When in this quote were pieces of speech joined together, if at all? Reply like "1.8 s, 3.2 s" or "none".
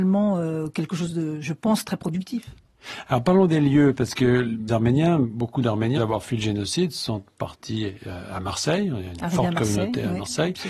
4.7 s, 6.0 s